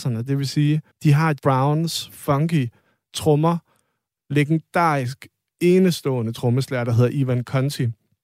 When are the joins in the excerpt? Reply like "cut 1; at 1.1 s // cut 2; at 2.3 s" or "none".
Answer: cut 1; at 0.9 s // cut 2; at 1.4 s // cut 3; at 4.2 s

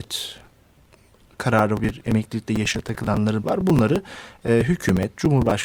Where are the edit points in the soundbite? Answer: cut 1; at 1.8 s // cut 2; at 3.4 s

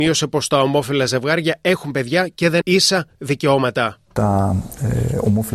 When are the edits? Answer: cut 1; at 2.6 s

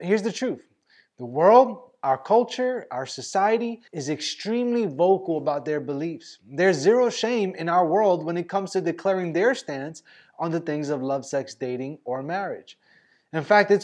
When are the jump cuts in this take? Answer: cut 1; at 3.9 s

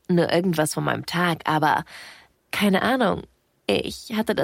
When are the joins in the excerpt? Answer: cut 1; at 2.3 s

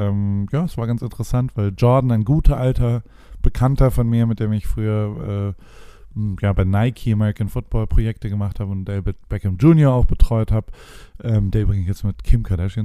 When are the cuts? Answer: none

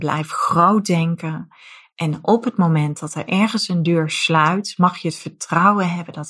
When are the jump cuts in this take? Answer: none

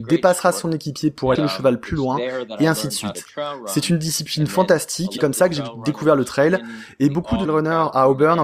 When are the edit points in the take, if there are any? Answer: cut 1; at 1.4 s // cut 2; at 5.2 s // cut 3; at 7.5 s

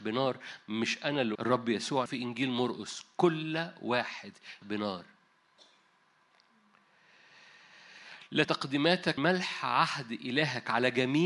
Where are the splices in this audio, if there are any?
cut 1; at 1.3 s // cut 2; at 2.1 s // cut 3; at 4.6 s // cut 4; at 8.4 s // cut 5; at 9.2 s

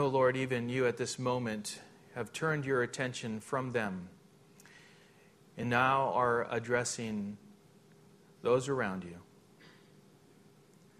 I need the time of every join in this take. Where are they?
none

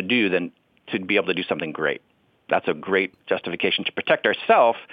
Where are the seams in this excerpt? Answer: none

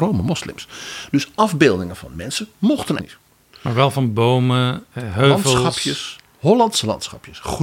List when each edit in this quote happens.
cut 1; at 3.0 s

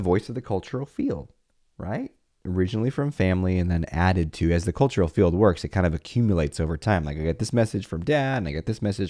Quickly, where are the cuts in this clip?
none

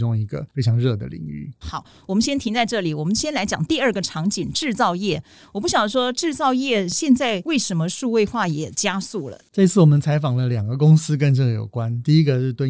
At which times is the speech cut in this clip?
none

